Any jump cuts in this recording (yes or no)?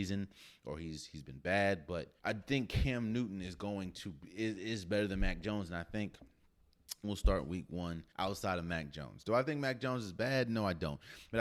yes